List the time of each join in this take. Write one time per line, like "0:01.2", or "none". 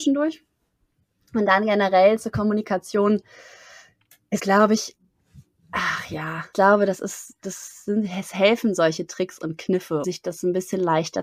0:04.4
0:06.5
0:10.0

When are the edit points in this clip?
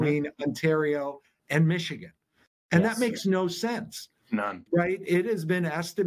none

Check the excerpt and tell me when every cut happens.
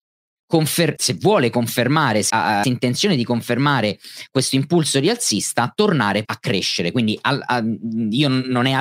0:01.0
0:02.3
0:02.6
0:06.2

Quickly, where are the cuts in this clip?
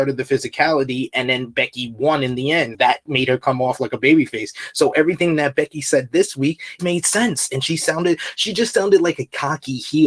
0:02.7
0:06.8

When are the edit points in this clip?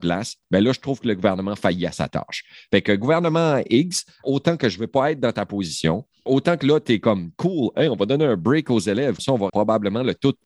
0:04.2
0:06.3
0:09.2
0:09.5

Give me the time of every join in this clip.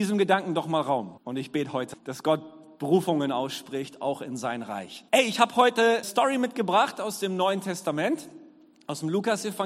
0:01.2
0:01.9
0:05.1
0:06.0

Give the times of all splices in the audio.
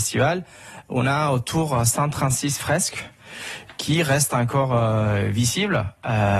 none

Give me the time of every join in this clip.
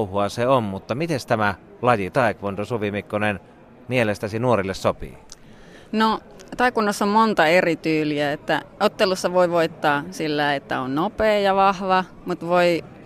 none

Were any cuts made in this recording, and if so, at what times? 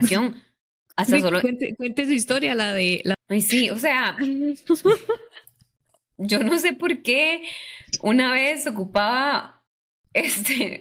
0:03.1

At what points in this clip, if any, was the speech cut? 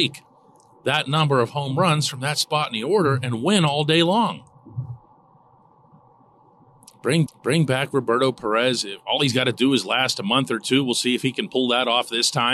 0:07.3

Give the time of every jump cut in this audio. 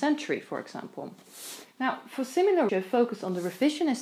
0:01.7
0:02.7

